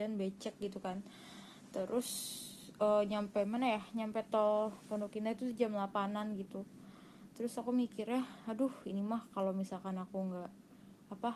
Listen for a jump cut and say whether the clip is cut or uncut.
uncut